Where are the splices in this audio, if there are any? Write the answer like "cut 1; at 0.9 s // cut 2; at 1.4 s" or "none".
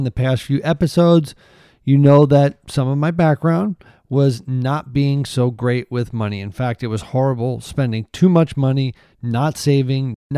none